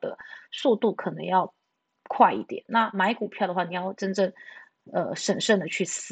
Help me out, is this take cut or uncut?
uncut